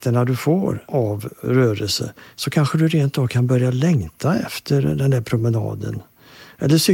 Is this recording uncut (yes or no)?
yes